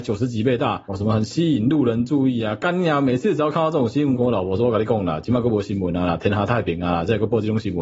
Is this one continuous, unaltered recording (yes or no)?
no